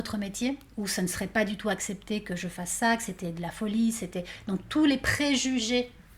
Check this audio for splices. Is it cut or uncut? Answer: uncut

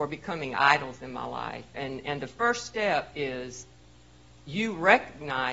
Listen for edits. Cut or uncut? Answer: uncut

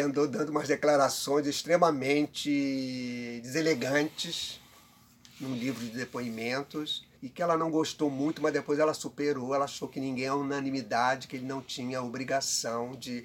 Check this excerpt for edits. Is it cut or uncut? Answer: cut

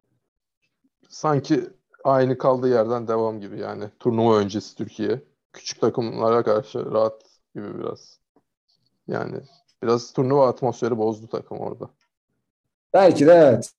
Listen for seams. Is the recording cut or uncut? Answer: uncut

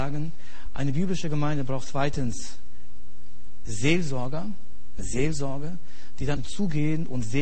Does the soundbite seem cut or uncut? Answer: cut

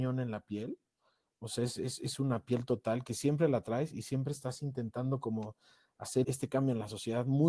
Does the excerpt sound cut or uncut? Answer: cut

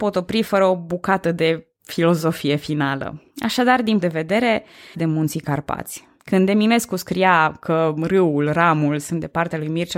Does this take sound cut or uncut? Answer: cut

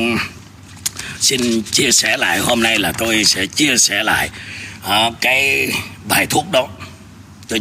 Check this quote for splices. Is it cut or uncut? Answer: uncut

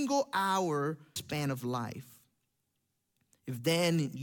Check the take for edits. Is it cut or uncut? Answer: cut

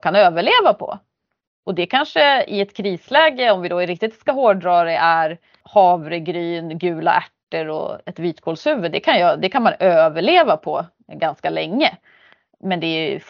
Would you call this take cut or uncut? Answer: uncut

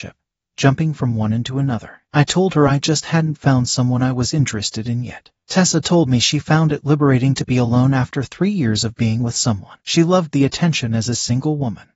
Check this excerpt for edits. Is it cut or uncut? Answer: cut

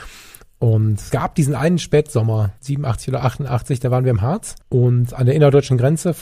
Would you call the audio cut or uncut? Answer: cut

